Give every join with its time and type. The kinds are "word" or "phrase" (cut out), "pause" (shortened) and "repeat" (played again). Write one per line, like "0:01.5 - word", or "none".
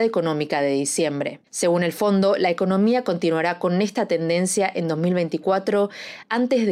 0:01.5 - pause